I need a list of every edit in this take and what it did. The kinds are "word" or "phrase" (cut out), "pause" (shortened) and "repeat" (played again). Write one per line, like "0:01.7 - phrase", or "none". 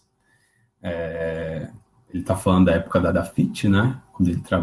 none